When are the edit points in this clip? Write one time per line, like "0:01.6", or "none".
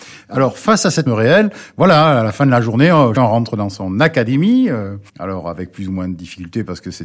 0:01.1
0:03.2
0:05.1